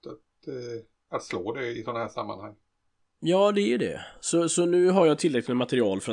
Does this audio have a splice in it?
no; 0 cuts

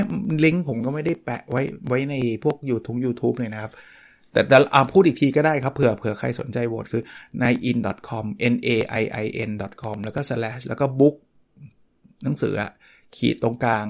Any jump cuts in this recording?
no; 0 cuts

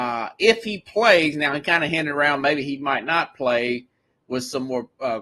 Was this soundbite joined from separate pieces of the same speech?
no; 0 cuts

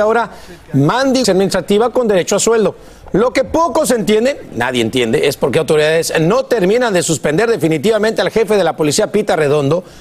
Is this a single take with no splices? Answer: no; 1 cut; at 1.2 s

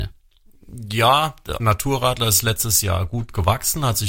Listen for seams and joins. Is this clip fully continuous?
no; 1 cut; at 1.6 s

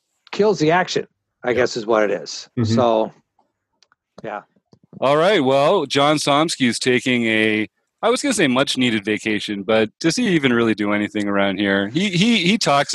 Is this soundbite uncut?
yes; 0 cuts

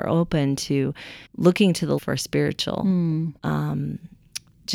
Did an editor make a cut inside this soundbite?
yes; 3 cuts; at 1.3 s, 2.0 s, 3.4 s

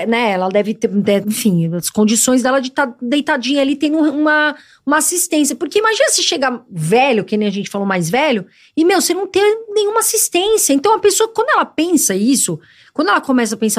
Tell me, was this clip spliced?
yes; 1 cut; at 1.2 s

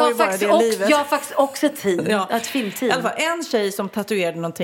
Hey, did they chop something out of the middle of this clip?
no; 0 cuts

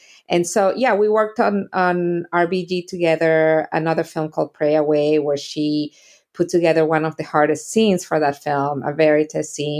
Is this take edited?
no; 0 cuts

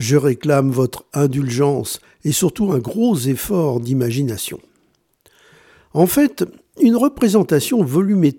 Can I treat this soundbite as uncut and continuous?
yes; 0 cuts

